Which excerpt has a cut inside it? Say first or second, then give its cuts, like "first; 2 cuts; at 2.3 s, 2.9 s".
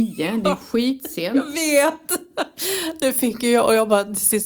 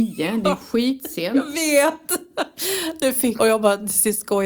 second; 1 cut; at 3.4 s